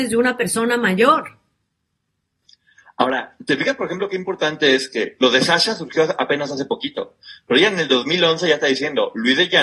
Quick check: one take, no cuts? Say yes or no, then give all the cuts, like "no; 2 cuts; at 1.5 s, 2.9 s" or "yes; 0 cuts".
yes; 0 cuts